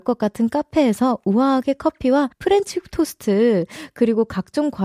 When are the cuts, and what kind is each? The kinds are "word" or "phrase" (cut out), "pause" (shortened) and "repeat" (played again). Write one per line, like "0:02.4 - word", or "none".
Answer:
0:02.3 - pause